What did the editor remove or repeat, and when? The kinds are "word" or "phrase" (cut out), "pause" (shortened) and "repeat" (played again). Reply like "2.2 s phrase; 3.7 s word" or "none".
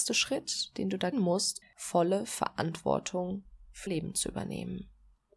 1.1 s word; 1.6 s word; 3.9 s word